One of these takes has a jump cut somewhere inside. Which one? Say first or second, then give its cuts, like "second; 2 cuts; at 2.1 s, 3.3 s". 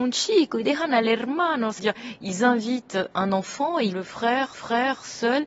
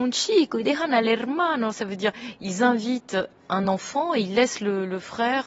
first; 4 cuts; at 1.8 s, 3.1 s, 3.9 s, 4.5 s